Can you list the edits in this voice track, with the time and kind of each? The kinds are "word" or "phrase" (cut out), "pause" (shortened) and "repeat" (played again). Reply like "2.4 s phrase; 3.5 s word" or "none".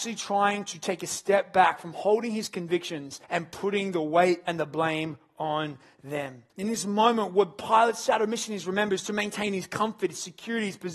3.2 s pause; 6.5 s pause